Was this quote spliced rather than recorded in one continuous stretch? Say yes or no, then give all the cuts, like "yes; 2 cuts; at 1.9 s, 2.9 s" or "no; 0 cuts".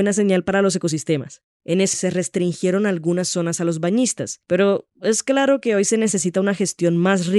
yes; 1 cut; at 1.9 s